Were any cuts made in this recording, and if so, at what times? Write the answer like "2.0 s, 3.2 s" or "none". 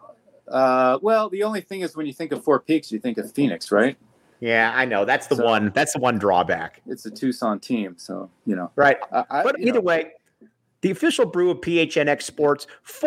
9.5 s